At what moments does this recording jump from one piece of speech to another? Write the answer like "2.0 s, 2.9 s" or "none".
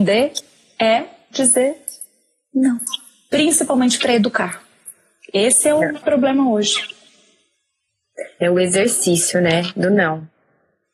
6.0 s